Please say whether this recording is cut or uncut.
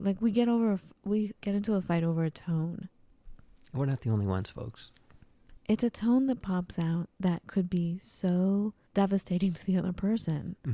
uncut